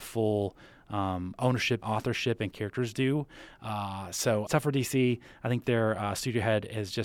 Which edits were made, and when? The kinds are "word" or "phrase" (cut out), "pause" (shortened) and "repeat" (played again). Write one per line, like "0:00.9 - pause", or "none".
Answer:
0:01.8 - word
0:02.5 - phrase
0:04.5 - phrase